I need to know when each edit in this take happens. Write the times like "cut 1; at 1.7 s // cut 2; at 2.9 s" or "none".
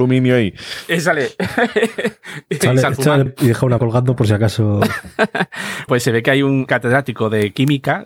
cut 1; at 3.3 s // cut 2; at 3.8 s // cut 3; at 5.9 s